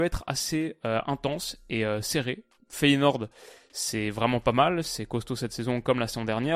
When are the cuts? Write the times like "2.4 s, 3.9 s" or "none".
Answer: none